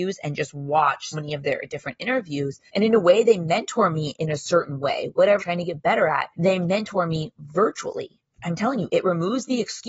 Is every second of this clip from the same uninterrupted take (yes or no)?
no